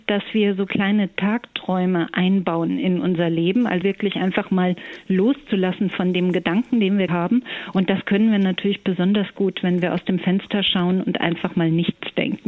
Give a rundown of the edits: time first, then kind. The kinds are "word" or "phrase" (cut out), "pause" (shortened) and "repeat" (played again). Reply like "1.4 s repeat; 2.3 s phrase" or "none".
3.8 s phrase; 7.1 s word